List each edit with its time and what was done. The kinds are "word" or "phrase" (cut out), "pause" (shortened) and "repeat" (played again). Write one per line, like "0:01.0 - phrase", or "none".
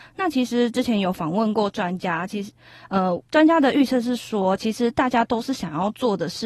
0:03.3 - pause